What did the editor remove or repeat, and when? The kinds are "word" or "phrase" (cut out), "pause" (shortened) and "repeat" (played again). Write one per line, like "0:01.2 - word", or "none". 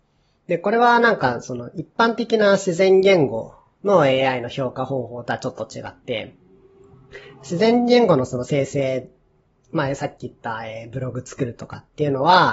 none